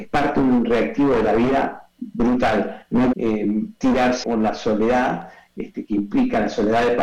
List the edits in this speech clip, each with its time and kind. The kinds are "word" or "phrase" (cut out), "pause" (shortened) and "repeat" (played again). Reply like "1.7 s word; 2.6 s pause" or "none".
3.1 s word; 4.2 s word

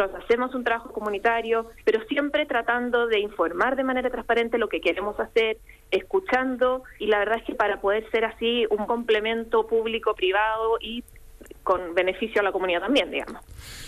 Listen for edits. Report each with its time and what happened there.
7.0 s word; 8.9 s word

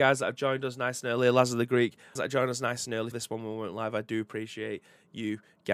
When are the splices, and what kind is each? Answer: 2.2 s phrase; 3.1 s word

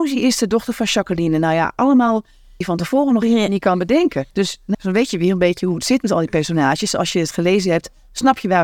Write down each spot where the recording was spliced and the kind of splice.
2.6 s phrase; 4.3 s pause; 4.7 s word

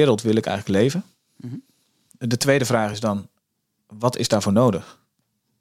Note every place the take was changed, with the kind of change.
none

